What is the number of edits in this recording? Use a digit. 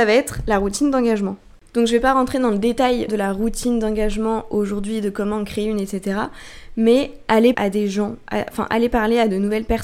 2